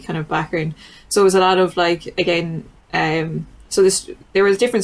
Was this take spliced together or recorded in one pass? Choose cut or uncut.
uncut